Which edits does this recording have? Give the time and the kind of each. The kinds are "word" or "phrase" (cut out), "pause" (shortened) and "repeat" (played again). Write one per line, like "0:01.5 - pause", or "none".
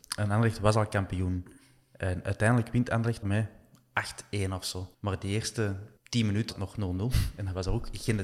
0:03.2 - word
0:04.9 - pause
0:06.0 - pause
0:06.5 - phrase